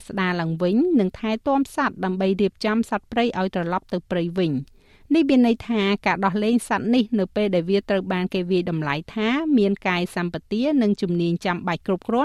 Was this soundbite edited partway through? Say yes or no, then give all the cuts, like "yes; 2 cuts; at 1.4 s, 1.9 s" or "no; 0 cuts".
no; 0 cuts